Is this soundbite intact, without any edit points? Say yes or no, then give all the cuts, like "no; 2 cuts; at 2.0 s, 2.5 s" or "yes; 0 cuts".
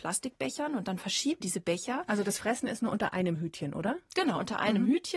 no; 1 cut; at 1.4 s